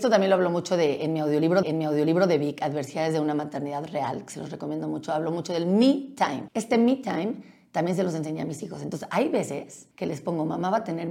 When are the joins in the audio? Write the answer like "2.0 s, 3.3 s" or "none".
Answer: 1.6 s, 9.9 s